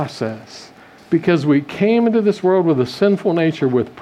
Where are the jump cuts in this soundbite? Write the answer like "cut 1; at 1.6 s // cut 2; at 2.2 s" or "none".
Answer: none